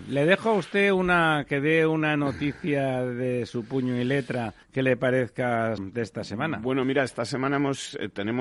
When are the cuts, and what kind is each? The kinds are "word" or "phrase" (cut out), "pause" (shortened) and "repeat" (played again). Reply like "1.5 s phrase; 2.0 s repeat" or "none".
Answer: 4.6 s pause; 5.8 s word